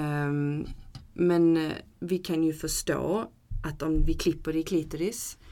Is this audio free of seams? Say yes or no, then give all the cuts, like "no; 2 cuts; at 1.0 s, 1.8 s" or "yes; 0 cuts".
no; 1 cut; at 1.9 s